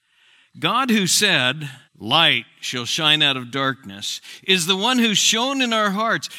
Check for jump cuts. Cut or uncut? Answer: cut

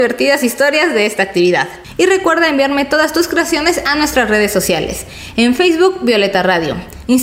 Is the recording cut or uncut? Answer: uncut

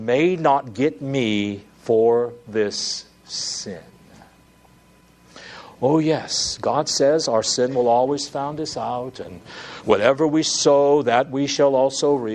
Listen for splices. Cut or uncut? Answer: uncut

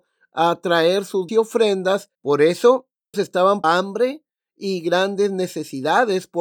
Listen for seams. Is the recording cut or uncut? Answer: cut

